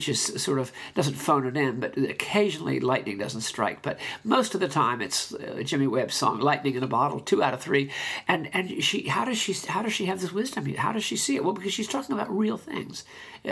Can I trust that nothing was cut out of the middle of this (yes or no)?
yes